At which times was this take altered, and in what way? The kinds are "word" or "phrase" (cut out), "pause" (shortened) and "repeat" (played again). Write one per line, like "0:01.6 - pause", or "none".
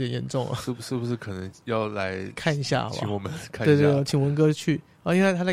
none